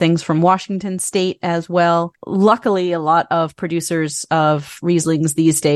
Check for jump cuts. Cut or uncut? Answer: uncut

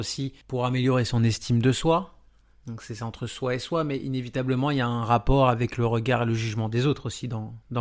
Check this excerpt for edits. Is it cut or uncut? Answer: uncut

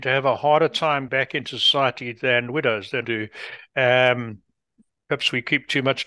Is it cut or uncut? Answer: cut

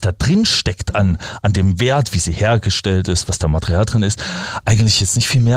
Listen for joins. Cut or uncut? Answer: uncut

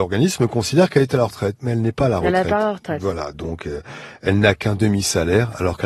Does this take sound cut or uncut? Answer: uncut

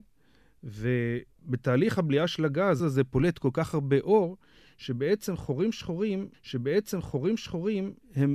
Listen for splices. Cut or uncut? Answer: cut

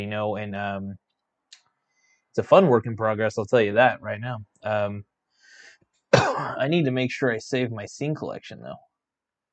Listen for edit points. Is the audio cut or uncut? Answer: uncut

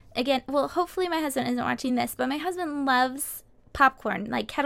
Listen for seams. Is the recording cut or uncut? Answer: uncut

